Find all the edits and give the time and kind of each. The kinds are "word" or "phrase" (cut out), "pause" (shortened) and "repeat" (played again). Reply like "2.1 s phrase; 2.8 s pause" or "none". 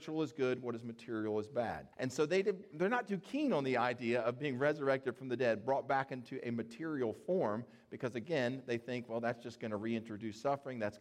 1.9 s pause